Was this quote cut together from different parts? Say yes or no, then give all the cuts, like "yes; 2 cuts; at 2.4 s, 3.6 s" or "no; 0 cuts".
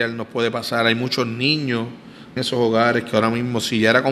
yes; 1 cut; at 2.4 s